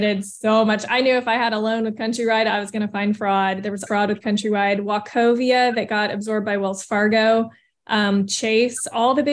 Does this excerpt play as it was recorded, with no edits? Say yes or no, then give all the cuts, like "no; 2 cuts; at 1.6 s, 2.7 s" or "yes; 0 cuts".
no; 1 cut; at 3.9 s